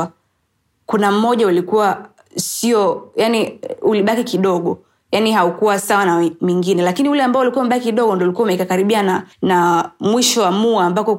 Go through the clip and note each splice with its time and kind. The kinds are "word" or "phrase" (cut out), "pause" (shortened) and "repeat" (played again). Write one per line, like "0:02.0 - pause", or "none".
0:09.3 - pause